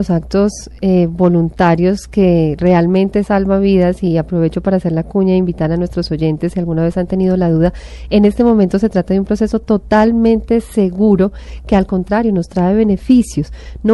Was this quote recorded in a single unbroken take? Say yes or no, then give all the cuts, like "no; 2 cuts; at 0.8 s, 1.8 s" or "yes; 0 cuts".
yes; 0 cuts